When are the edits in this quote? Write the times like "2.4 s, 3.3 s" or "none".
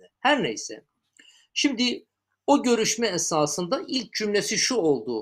none

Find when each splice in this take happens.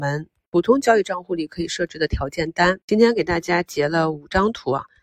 2.8 s

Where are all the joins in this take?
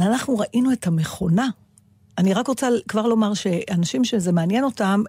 none

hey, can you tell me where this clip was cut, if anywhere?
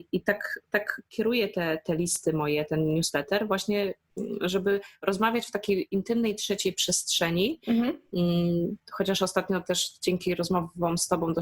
none

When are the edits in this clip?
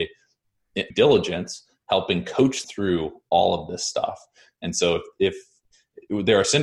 0.9 s, 2.6 s

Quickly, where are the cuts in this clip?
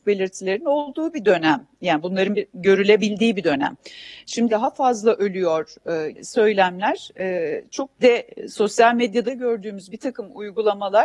4.5 s, 6.1 s, 8.0 s, 9.3 s

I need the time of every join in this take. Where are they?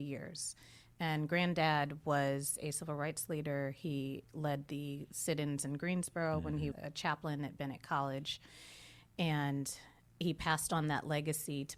6.7 s

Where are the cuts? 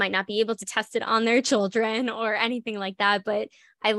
none

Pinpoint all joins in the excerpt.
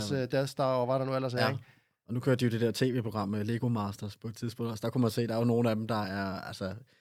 none

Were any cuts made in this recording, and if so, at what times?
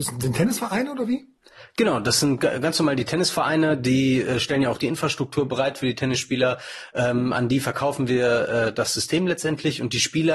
8.7 s

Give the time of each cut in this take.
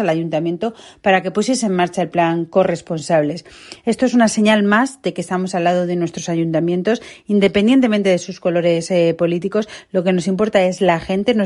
none

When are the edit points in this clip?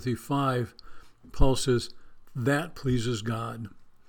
none

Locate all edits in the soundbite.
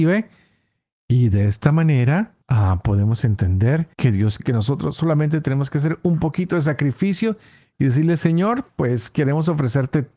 2.4 s, 3.9 s, 4.4 s

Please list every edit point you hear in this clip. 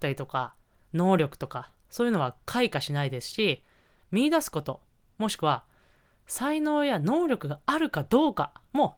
none

